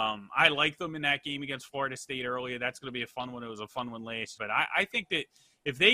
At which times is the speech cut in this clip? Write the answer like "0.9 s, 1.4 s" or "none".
4.4 s